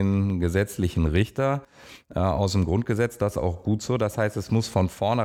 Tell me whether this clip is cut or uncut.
uncut